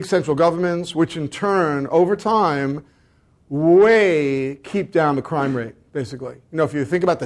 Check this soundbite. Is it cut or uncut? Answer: uncut